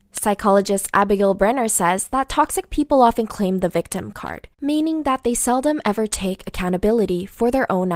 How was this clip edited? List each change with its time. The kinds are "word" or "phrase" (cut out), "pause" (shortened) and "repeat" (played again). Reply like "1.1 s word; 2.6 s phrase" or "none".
4.5 s pause

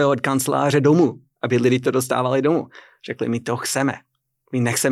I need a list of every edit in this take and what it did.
none

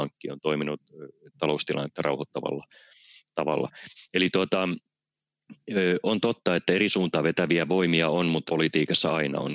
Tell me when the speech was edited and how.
8.5 s word

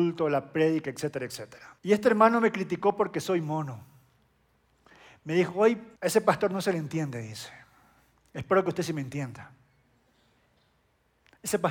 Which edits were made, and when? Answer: 1.8 s pause; 6.0 s pause

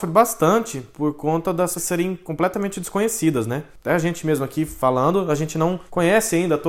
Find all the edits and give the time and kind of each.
1.8 s word

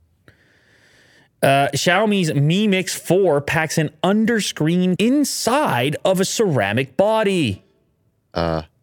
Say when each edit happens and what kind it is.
5.0 s word

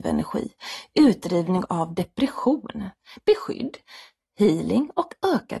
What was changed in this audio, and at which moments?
none

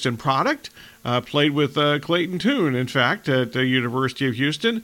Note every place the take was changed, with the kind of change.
none

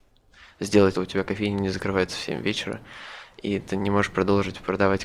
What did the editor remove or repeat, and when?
0.9 s phrase

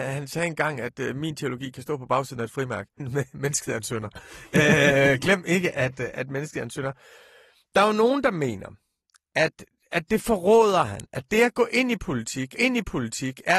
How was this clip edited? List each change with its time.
3.0 s word; 12.6 s repeat

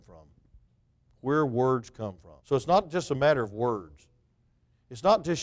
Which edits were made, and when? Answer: 2.4 s pause

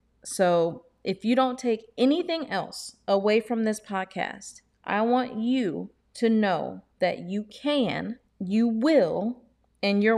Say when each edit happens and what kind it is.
6.0 s pause; 6.9 s pause; 8.3 s pause

